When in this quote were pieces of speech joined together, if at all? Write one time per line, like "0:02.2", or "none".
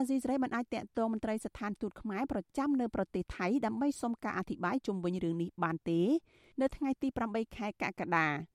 none